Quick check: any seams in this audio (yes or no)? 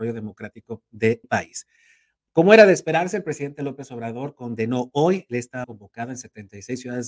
yes